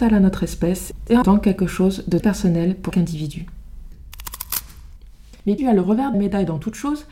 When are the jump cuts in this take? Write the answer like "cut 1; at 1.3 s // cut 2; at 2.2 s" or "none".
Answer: cut 1; at 1.2 s // cut 2; at 2.2 s // cut 3; at 2.9 s // cut 4; at 5.6 s // cut 5; at 6.1 s